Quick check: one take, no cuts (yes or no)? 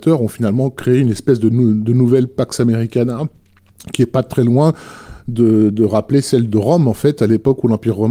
yes